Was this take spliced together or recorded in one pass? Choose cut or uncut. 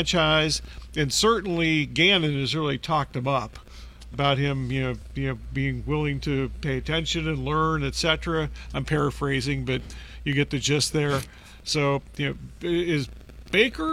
cut